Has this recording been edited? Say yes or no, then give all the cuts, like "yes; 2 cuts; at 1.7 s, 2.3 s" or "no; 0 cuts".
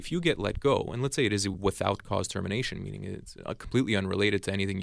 no; 0 cuts